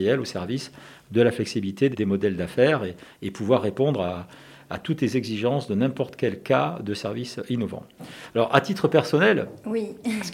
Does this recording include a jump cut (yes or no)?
yes